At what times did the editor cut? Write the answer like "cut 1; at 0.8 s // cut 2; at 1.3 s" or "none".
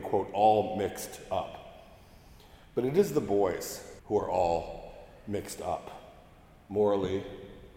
cut 1; at 4.0 s